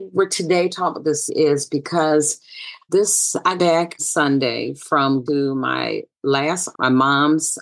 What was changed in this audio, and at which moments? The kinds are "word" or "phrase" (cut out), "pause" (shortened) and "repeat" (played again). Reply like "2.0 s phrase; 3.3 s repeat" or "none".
1.3 s word; 2.9 s word; 3.6 s word; 4.0 s word; 5.3 s word; 6.7 s word